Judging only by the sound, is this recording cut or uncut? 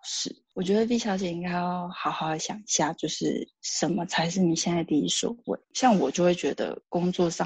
uncut